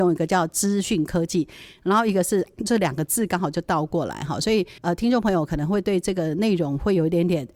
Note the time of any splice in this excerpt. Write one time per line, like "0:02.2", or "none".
0:04.8